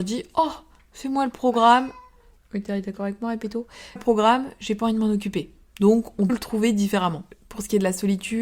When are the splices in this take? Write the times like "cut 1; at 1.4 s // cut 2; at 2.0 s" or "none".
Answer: cut 1; at 4.0 s // cut 2; at 6.3 s

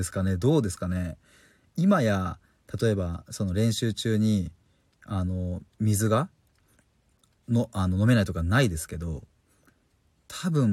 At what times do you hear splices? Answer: cut 1; at 5.7 s

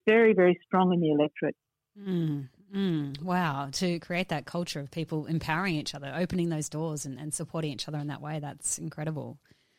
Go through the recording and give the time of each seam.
none

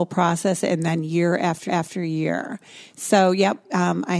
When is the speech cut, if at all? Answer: cut 1; at 1.7 s

